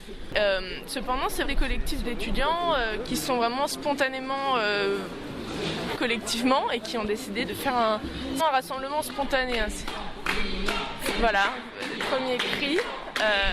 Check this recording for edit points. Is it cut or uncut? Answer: cut